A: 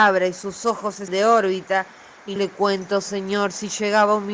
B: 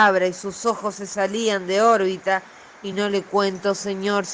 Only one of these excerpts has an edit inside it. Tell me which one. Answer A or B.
A